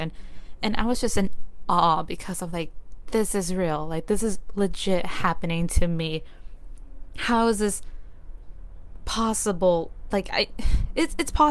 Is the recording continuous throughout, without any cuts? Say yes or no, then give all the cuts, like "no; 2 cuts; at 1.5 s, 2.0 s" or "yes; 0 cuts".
yes; 0 cuts